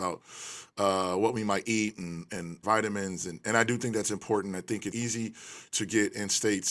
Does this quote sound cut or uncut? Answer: cut